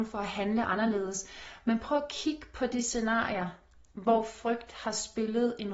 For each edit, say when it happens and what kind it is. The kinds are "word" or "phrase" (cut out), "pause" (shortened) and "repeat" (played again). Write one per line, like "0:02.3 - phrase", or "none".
none

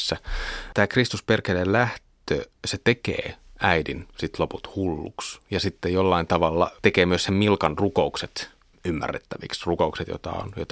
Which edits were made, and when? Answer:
0:02.5 - pause

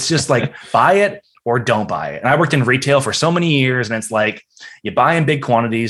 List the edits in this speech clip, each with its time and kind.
none

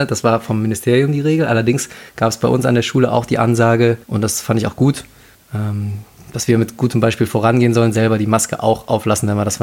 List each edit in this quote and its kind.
0:02.1 - pause
0:04.0 - pause
0:05.3 - pause

